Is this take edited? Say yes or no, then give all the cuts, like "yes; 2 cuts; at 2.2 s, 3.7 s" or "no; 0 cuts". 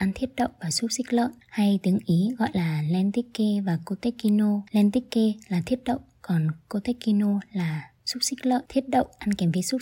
yes; 4 cuts; at 1.4 s, 4.7 s, 8.0 s, 8.7 s